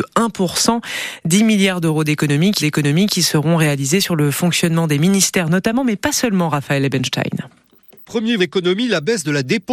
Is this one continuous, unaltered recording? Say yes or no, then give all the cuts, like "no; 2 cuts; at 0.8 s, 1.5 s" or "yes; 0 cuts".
no; 2 cuts; at 2.6 s, 8.4 s